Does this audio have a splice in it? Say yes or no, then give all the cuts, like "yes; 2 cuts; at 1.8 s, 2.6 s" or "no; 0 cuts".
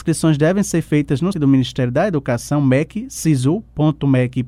yes; 1 cut; at 1.3 s